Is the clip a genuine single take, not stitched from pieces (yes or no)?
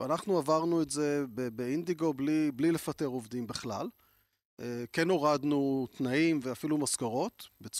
yes